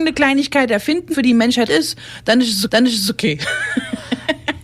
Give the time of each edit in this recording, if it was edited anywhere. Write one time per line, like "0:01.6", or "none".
0:01.1
0:01.7
0:02.7